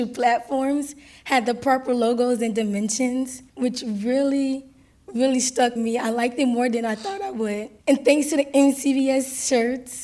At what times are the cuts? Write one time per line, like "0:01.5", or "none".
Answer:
0:03.5
0:05.8
0:07.8